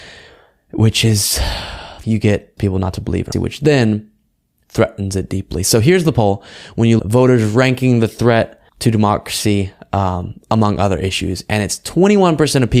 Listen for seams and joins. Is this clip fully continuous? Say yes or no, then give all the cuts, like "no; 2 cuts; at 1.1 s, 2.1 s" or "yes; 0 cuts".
no; 5 cuts; at 2.0 s, 2.6 s, 3.3 s, 7.0 s, 8.7 s